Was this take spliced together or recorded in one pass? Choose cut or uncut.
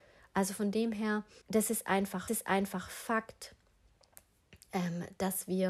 cut